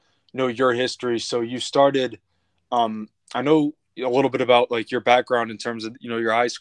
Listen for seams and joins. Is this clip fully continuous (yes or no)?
yes